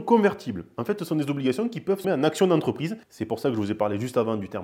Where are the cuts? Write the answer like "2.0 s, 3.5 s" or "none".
2.0 s, 3.0 s